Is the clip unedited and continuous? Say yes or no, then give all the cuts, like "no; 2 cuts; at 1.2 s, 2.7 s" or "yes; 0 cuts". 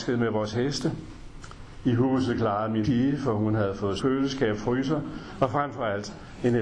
no; 2 cuts; at 2.8 s, 4.0 s